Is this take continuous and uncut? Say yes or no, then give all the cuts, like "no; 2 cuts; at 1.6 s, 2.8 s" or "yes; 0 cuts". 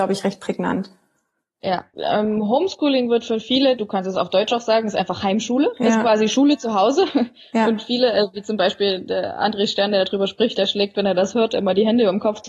no; 1 cut; at 1.9 s